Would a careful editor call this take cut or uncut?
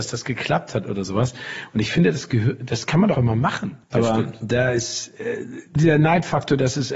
cut